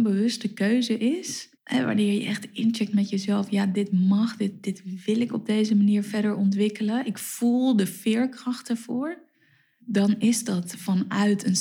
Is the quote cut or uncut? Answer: cut